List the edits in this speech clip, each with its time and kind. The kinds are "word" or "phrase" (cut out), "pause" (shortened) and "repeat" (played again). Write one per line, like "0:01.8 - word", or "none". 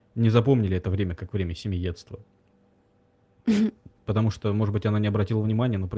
0:03.9 - pause